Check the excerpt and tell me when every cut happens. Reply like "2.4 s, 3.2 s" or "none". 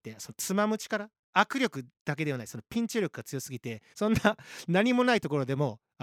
3.9 s